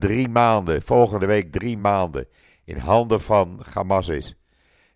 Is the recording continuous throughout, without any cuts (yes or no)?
yes